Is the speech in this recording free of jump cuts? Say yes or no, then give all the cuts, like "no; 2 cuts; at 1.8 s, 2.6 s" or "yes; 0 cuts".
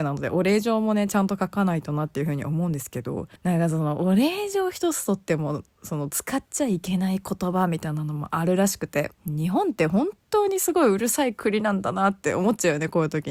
no; 2 cuts; at 3.4 s, 9.2 s